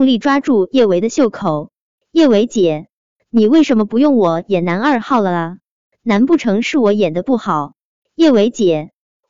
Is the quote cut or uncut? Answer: uncut